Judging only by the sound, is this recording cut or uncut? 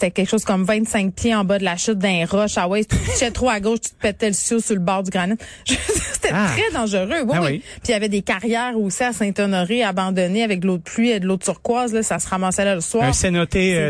uncut